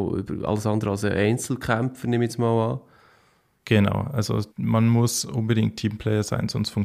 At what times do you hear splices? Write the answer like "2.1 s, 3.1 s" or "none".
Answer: 4.5 s